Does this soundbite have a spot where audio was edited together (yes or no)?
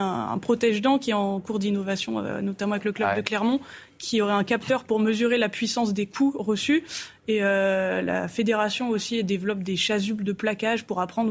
no